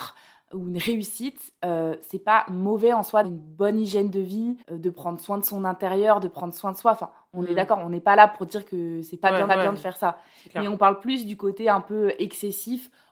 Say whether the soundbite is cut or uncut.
cut